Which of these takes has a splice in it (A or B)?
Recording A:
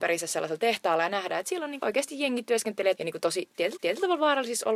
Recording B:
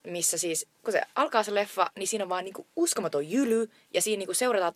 A